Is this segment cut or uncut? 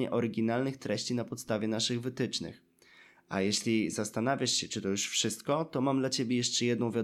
uncut